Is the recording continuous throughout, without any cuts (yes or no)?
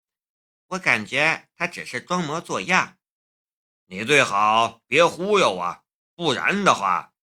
no